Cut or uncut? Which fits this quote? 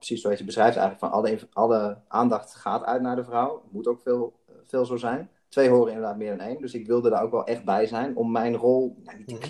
uncut